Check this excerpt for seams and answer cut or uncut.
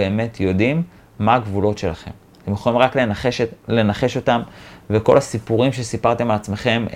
uncut